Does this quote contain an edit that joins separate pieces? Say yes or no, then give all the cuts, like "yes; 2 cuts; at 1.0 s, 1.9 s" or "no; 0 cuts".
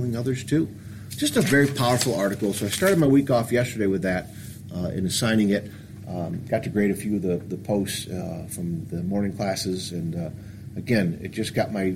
no; 0 cuts